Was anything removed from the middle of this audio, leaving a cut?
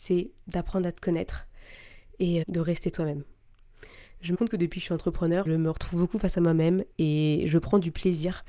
yes; 3 cuts; at 2.4 s, 4.3 s, 5.5 s

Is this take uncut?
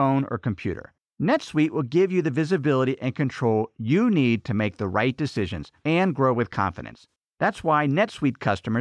no; 2 cuts; at 1.0 s, 7.2 s

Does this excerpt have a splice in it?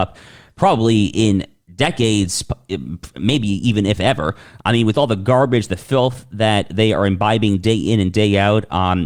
no; 0 cuts

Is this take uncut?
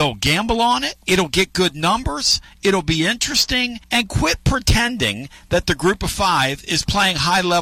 no; 2 cuts; at 1.0 s, 3.8 s

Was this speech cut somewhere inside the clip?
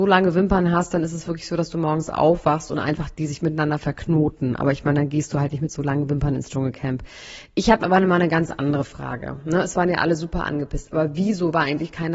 no; 0 cuts

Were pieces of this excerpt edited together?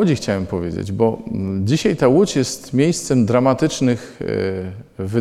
no; 0 cuts

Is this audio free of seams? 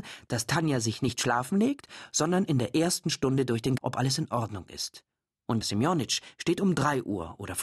no; 2 cuts; at 3.8 s, 5.6 s

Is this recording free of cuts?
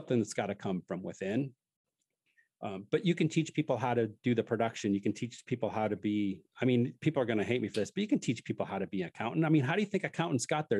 yes; 0 cuts

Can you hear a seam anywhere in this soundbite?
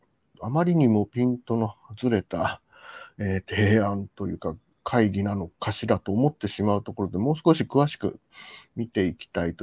yes; 1 cut; at 5.5 s

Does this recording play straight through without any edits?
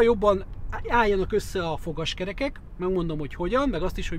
yes; 0 cuts

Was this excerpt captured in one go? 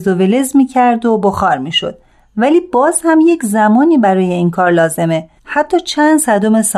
no; 1 cut; at 5.4 s

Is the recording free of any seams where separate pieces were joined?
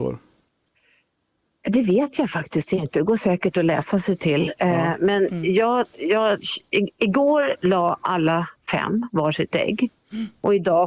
yes; 0 cuts

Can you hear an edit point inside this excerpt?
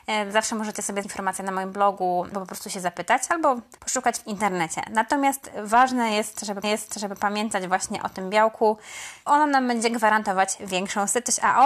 yes; 5 cuts; at 1.0 s, 2.3 s, 3.8 s, 6.6 s, 9.3 s

